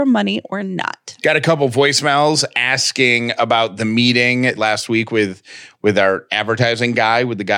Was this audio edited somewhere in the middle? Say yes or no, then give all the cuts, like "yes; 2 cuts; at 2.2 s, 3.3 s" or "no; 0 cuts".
yes; 1 cut; at 4.6 s